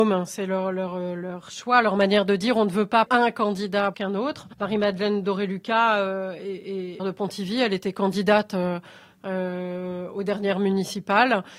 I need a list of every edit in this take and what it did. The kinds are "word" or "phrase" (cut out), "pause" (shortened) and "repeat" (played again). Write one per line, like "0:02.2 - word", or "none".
0:03.1 - word
0:03.9 - word
0:04.5 - pause
0:07.0 - word